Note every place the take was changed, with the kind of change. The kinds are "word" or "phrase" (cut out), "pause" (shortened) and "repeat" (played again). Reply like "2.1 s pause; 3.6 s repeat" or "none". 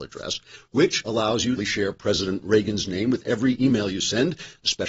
1.6 s phrase